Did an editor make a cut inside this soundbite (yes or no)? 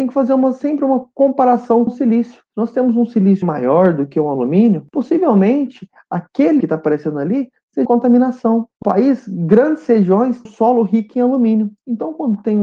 yes